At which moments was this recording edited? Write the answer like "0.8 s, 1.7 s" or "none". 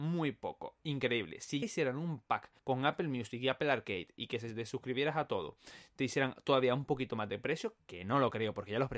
1.6 s, 2.6 s